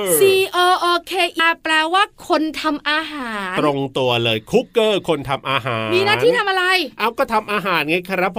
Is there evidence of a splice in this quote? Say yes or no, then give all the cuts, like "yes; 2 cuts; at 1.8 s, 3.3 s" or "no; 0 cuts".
yes; 1 cut; at 1.4 s